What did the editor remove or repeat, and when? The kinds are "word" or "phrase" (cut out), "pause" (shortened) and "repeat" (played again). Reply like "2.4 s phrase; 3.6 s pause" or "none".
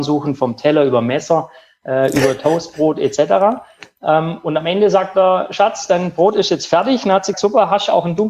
7.3 s word